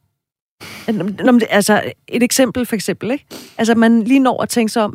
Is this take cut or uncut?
uncut